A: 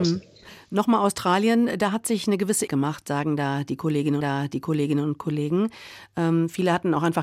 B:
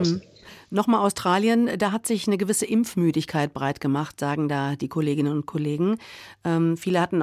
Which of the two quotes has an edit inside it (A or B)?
A